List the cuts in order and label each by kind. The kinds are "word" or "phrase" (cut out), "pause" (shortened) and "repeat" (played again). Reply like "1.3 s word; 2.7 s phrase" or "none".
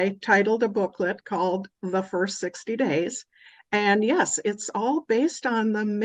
none